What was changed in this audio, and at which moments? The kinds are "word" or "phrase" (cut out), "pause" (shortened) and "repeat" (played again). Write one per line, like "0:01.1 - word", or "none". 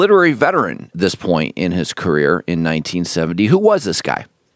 0:00.9 - word

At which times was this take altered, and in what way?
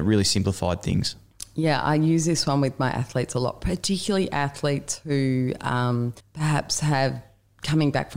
0:06.2 - pause

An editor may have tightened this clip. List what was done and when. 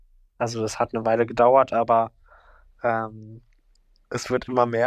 none

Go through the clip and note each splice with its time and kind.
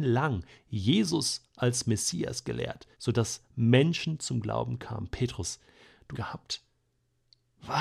0:02.9 - pause
0:06.1 - phrase

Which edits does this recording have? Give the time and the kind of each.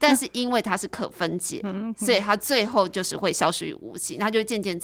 none

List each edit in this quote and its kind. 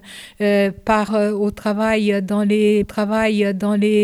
0:01.1 - word
0:02.8 - repeat

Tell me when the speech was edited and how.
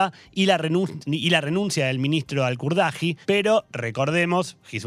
0:03.2 - pause

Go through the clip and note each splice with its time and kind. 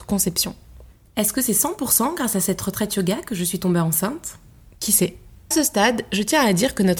0:05.5 - word

